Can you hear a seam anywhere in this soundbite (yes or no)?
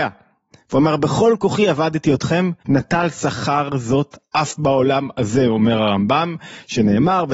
yes